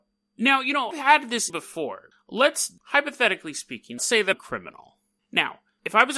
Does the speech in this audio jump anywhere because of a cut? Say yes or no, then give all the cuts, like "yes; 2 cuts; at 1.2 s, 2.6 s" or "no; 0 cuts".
yes; 6 cuts; at 0.9 s, 1.5 s, 2.1 s, 2.8 s, 4.0 s, 4.3 s